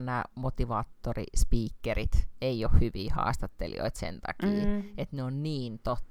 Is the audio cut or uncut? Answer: uncut